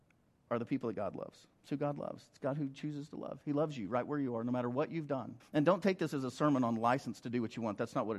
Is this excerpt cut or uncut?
cut